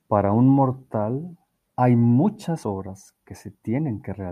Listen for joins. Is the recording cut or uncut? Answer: cut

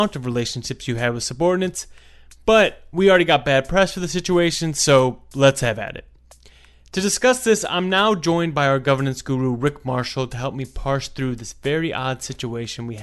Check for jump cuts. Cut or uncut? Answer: uncut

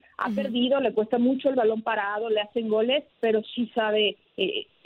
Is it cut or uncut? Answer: cut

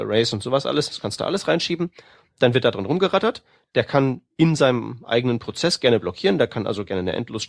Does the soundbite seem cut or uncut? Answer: uncut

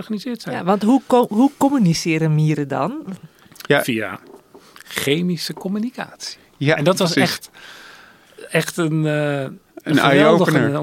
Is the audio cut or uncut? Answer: uncut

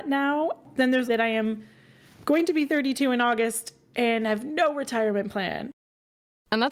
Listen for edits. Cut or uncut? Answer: cut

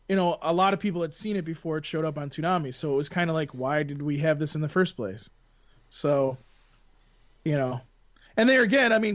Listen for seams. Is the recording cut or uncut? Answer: uncut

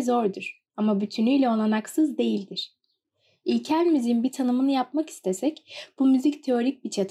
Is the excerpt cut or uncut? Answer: uncut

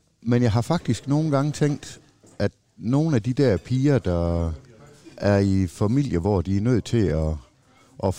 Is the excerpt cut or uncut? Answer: uncut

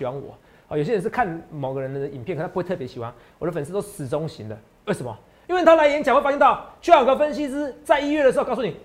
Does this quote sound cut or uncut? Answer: uncut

